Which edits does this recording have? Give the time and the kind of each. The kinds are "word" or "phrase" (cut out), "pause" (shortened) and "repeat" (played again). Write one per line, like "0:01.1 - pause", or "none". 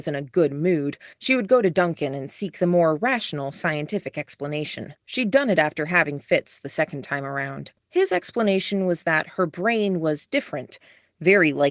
0:01.1 - pause
0:05.0 - pause
0:07.8 - pause